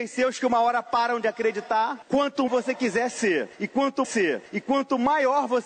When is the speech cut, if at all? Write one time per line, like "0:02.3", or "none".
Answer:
0:02.5
0:04.0